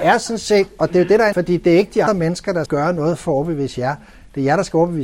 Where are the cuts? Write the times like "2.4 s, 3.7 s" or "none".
1.3 s, 2.1 s, 2.7 s